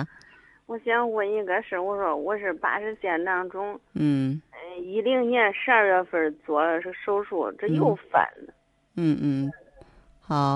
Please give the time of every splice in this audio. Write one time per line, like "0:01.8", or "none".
none